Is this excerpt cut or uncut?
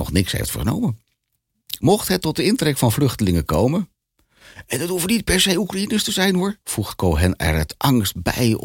cut